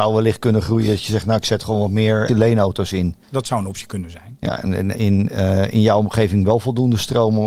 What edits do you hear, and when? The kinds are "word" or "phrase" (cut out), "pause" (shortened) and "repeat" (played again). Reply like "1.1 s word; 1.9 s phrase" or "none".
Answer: 2.3 s word; 3.2 s pause; 4.9 s phrase